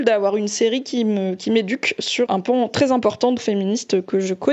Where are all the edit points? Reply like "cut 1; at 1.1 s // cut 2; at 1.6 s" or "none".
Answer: cut 1; at 2.3 s // cut 2; at 3.4 s